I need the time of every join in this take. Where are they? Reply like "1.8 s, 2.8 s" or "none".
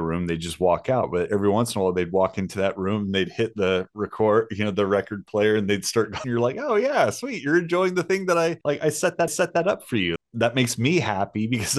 6.2 s, 8.6 s, 9.3 s, 10.2 s